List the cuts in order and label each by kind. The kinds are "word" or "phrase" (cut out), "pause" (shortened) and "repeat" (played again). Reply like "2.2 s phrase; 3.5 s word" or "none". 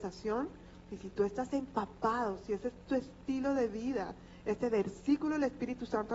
none